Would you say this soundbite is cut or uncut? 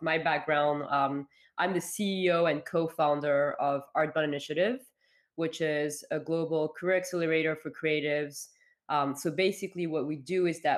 uncut